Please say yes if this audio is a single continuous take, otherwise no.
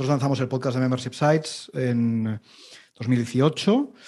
yes